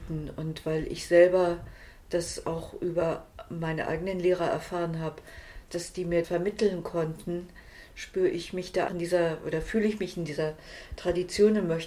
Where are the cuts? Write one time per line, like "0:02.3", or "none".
0:05.7
0:06.2
0:08.9

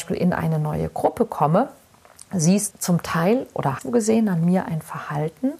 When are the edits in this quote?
0:02.7
0:03.8

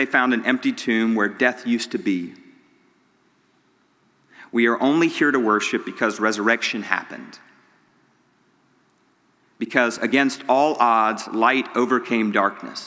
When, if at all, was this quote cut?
none

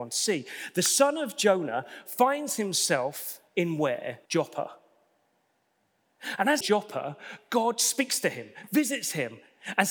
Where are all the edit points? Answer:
0:03.5
0:04.3
0:06.6

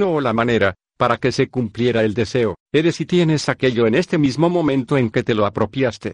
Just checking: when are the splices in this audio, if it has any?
0:02.6

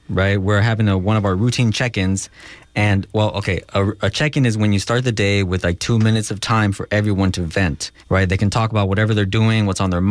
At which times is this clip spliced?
0:08.0

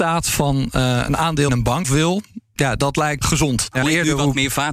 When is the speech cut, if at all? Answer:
0:01.5
0:01.8
0:03.2
0:03.8

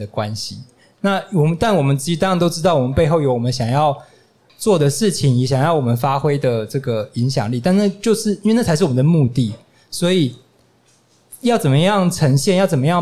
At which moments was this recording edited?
none

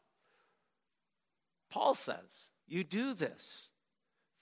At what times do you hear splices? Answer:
0:02.6

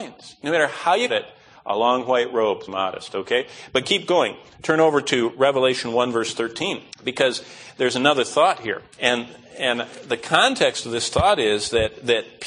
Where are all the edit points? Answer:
0:01.1
0:02.7
0:06.9
0:08.9

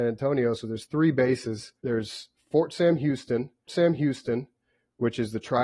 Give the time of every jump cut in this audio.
0:01.8
0:03.7

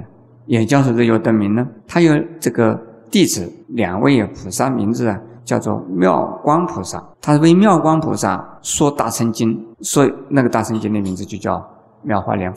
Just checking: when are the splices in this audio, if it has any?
0:01.8
0:03.6
0:05.4
0:07.1
0:08.6
0:09.7

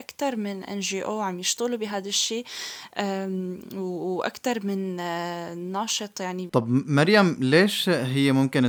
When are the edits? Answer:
0:06.5

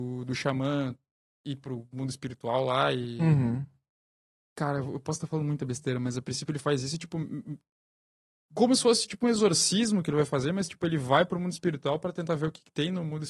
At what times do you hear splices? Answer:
none

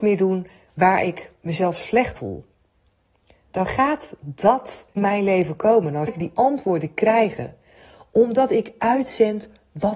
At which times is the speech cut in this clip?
0:02.2
0:05.0
0:06.1

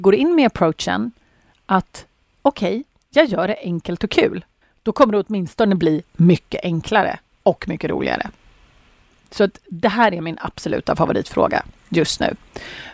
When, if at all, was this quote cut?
none

